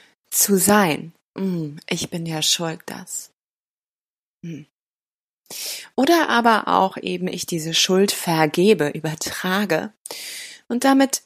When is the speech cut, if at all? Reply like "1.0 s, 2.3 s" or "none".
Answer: none